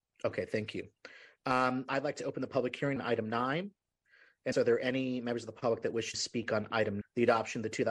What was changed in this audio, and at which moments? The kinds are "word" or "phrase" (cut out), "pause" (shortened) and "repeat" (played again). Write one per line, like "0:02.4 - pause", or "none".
0:01.9 - word
0:03.0 - word
0:04.5 - word
0:06.1 - word
0:07.0 - word